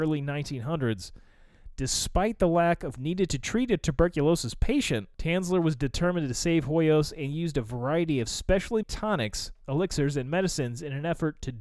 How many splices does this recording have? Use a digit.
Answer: 3